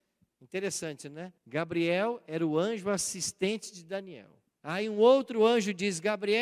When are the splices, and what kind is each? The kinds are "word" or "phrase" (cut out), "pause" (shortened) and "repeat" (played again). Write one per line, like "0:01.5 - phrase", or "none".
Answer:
0:01.4 - pause
0:04.5 - pause